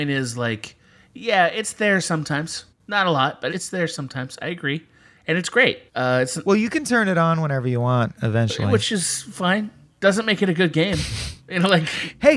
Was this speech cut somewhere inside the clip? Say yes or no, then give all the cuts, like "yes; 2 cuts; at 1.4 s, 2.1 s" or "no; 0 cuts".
yes; 4 cuts; at 2.7 s, 3.5 s, 5.9 s, 9.8 s